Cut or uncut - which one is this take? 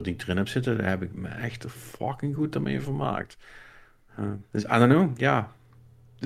uncut